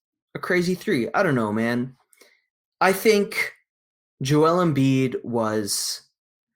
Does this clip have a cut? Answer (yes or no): no